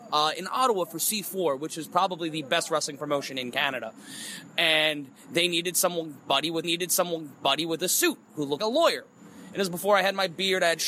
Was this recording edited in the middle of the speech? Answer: yes; 2 cuts; at 6.6 s, 8.6 s

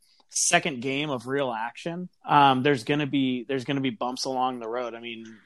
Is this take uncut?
no; 1 cut; at 2.2 s

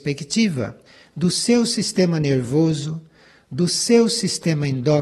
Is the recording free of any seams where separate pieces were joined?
yes; 0 cuts

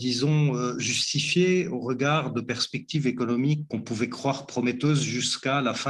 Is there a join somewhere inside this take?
yes; 1 cut; at 3.7 s

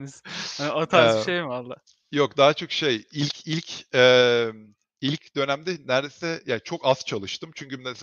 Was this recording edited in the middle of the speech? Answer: no; 0 cuts

